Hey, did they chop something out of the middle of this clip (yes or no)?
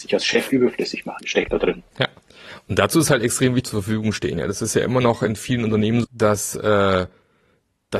yes